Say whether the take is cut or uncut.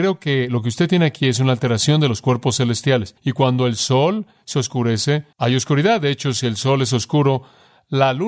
cut